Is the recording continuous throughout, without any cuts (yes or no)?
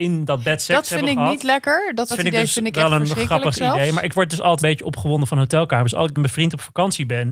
no